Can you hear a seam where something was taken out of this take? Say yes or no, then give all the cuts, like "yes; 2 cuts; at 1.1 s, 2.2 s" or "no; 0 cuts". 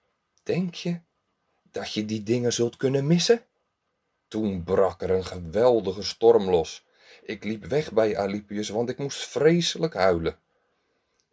no; 0 cuts